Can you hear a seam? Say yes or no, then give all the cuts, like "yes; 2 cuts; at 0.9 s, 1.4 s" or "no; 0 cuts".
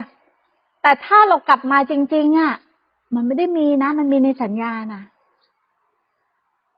no; 0 cuts